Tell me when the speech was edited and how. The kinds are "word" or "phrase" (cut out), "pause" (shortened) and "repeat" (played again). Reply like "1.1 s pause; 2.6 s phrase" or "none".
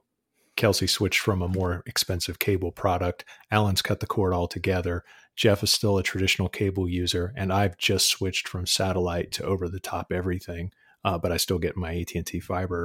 none

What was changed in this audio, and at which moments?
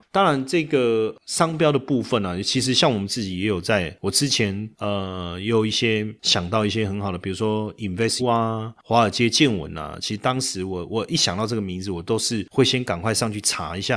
8.2 s word

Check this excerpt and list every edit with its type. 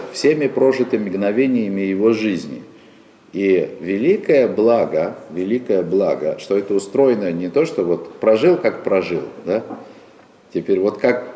none

